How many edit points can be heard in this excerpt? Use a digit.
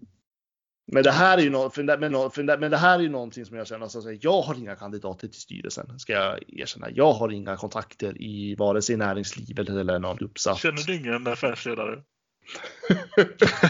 2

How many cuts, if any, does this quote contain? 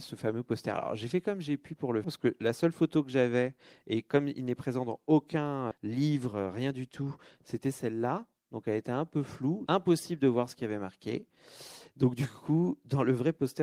3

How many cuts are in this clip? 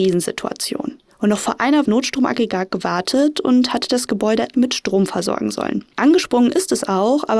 3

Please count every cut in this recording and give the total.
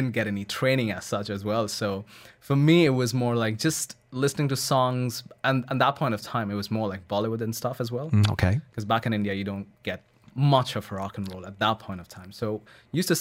0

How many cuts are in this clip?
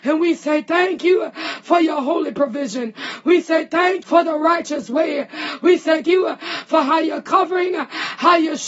2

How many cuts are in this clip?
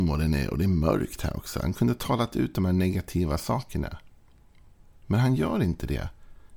0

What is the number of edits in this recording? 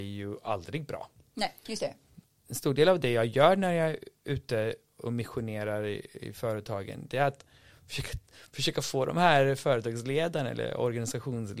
0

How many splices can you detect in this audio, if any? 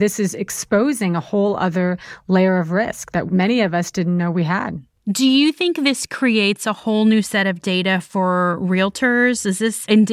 0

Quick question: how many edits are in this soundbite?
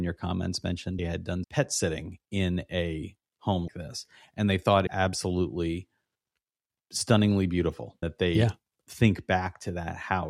5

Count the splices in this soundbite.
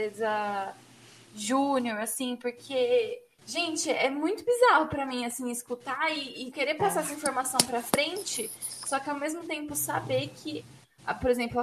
1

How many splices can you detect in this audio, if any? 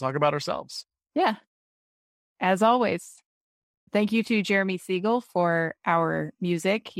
0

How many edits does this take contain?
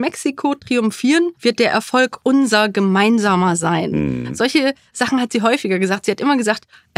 1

